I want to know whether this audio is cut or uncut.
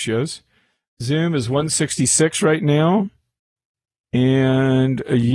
uncut